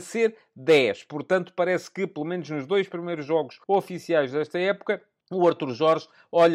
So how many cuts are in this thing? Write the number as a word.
two